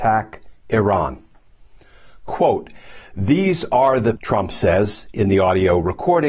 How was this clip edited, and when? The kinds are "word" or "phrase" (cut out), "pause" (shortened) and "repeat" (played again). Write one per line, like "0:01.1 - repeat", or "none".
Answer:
0:04.2 - word